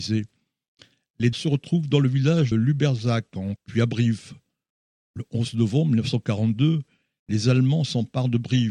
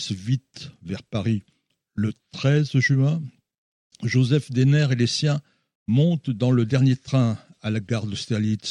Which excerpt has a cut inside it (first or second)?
first